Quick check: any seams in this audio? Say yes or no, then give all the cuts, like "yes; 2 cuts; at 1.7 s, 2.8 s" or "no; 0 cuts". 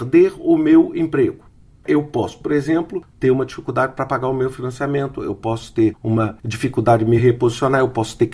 no; 0 cuts